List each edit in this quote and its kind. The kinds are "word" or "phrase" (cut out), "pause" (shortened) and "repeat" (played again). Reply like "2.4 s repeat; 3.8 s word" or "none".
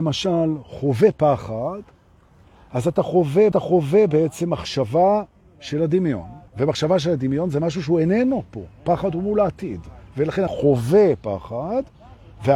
3.5 s repeat; 6.5 s pause; 10.5 s word